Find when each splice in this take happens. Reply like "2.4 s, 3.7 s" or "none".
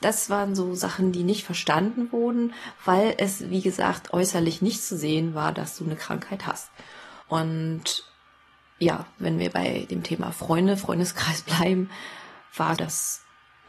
7.2 s, 12.8 s